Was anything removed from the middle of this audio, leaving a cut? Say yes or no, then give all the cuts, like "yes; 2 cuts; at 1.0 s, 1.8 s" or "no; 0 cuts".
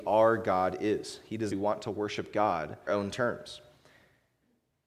yes; 2 cuts; at 1.5 s, 2.9 s